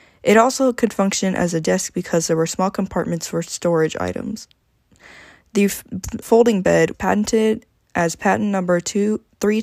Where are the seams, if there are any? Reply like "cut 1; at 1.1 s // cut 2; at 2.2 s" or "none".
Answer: cut 1; at 6.2 s // cut 2; at 6.9 s

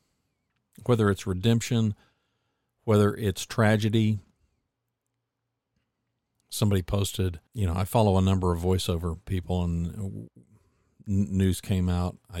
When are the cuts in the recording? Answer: cut 1; at 7.5 s

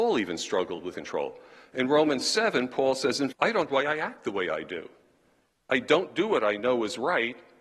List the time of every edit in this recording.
cut 1; at 0.9 s // cut 2; at 3.3 s // cut 3; at 3.7 s

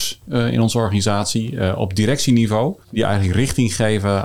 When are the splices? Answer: cut 1; at 2.8 s

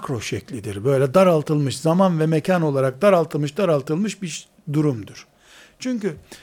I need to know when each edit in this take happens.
none

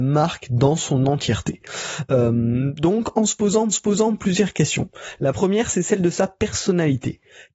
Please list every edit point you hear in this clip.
cut 1; at 3.7 s

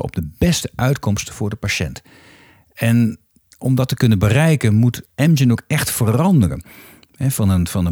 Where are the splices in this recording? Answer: none

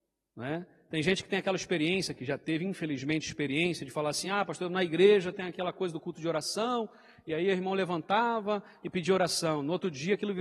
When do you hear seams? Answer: none

